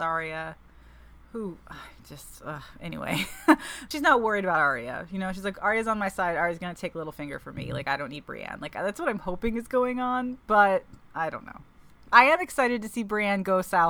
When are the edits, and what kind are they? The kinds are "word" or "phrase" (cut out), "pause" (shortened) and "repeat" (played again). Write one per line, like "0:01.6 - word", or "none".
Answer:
0:03.9 - phrase